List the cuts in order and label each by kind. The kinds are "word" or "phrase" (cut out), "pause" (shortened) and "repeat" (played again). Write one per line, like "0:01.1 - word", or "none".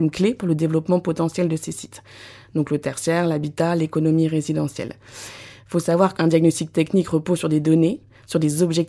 0:06.2 - word